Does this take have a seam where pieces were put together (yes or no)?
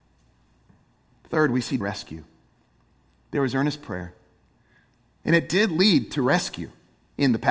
yes